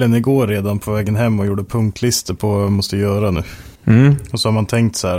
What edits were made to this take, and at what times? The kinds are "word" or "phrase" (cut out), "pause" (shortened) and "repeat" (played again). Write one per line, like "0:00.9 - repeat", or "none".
0:03.7 - pause

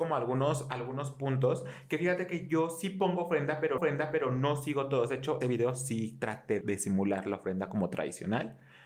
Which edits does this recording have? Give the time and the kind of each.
0:03.8 - repeat
0:05.4 - phrase
0:06.6 - word

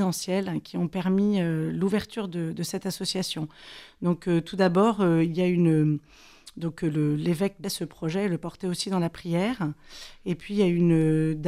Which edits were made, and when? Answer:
0:07.6 - phrase

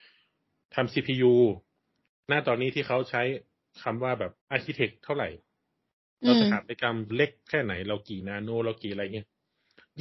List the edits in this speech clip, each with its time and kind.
0:04.4 - pause
0:07.1 - word

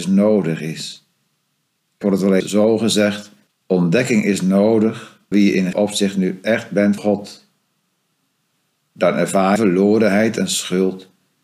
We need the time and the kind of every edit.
0:02.0 - phrase
0:02.4 - word
0:03.5 - pause
0:05.3 - word
0:05.7 - word
0:07.0 - word
0:09.6 - word

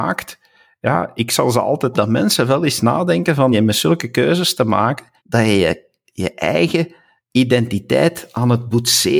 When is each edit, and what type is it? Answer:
0:01.9 - phrase
0:03.5 - word
0:05.2 - pause

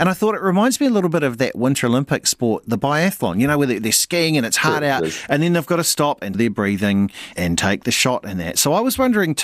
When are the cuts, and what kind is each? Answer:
0:06.3 - word
0:07.3 - word

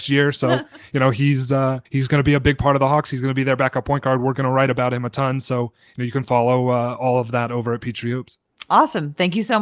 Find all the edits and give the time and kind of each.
0:01.8 - pause

